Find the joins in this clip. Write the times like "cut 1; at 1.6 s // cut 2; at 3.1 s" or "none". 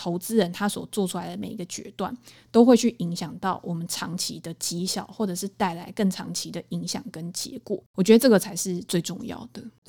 none